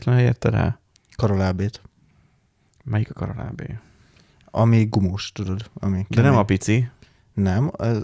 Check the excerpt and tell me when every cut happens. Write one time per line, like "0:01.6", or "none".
none